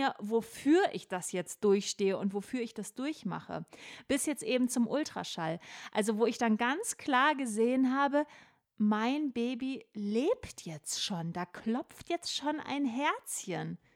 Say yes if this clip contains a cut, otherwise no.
no